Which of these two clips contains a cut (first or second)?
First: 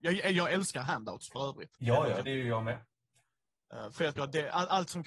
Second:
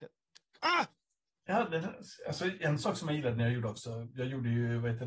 first